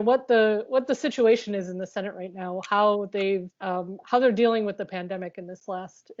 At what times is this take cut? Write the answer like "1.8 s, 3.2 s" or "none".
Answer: 3.5 s